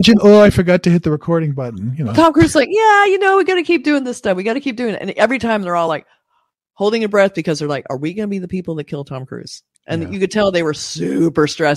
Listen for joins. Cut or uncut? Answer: uncut